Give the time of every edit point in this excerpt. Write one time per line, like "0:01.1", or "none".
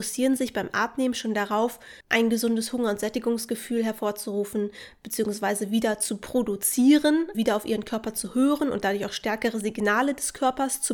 0:02.0
0:07.3